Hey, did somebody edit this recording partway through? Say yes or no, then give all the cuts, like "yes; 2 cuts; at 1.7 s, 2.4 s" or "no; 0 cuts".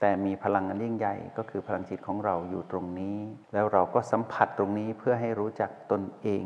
yes; 1 cut; at 3.4 s